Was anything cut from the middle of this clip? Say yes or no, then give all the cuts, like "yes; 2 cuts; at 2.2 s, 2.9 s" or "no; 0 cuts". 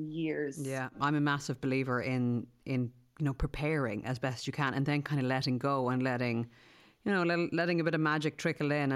no; 0 cuts